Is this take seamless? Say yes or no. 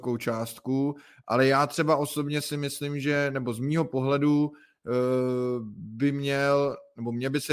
yes